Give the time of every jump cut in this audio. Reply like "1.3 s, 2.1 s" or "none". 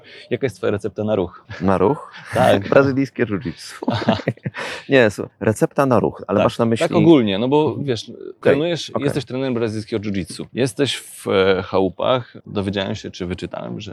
none